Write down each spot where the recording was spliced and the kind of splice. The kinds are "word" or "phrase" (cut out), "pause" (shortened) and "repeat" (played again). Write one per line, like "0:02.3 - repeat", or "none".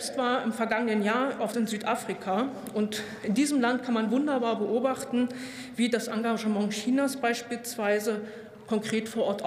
0:01.5 - word